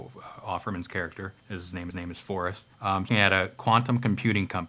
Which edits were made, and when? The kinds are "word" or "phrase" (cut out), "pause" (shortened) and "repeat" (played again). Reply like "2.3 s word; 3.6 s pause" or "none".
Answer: 1.4 s pause; 1.9 s repeat; 2.7 s pause; 3.1 s phrase